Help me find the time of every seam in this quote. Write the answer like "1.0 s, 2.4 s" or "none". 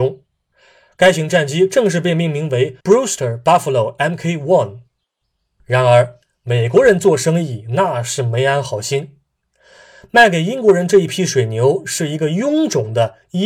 2.8 s